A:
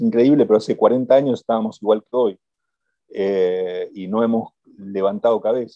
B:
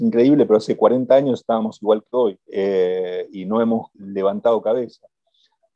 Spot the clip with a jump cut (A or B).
B